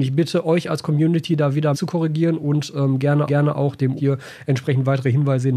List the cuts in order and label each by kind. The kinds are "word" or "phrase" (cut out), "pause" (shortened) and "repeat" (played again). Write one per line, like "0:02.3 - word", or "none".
0:01.7 - word
0:03.3 - repeat
0:04.0 - word